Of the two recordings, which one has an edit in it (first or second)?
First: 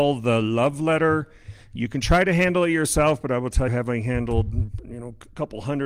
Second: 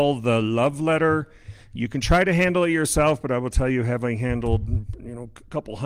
first